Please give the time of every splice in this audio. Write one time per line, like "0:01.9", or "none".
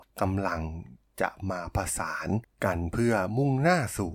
none